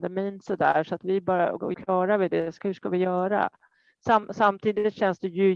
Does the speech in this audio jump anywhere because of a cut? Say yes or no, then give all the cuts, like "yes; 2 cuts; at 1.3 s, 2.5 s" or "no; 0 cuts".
yes; 1 cut; at 1.7 s